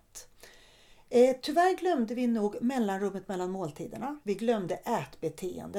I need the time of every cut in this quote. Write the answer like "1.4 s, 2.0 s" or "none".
4.2 s